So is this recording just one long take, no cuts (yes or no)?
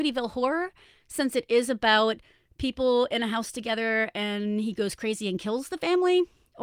yes